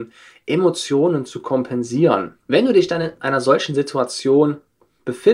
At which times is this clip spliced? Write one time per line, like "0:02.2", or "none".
0:02.4

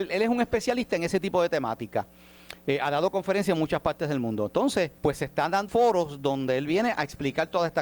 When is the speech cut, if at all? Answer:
0:05.0
0:05.7

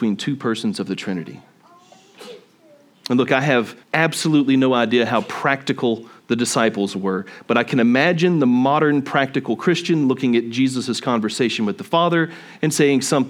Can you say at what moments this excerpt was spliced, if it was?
0:03.8

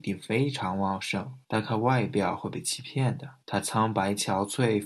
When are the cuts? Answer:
0:01.4
0:03.4

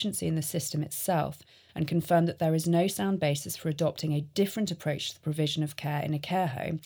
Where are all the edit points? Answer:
none

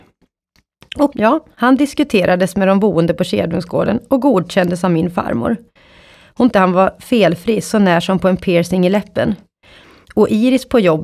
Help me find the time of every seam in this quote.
0:01.1
0:06.5

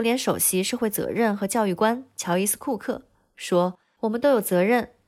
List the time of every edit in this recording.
0:03.8

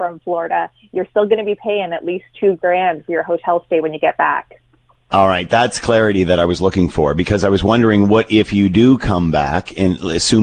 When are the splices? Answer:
none

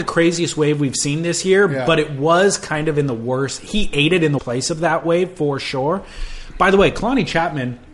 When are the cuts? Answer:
0:04.4

